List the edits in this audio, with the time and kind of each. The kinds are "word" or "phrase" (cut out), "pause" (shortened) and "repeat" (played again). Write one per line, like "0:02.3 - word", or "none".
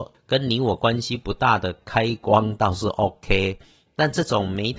none